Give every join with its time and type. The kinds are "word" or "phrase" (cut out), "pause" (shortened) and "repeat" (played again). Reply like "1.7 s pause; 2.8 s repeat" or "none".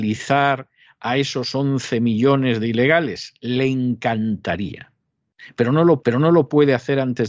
6.0 s repeat